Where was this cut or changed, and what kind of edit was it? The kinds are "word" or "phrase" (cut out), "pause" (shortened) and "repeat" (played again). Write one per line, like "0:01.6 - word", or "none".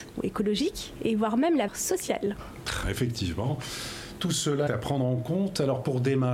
0:01.7 - word
0:02.8 - word
0:04.7 - word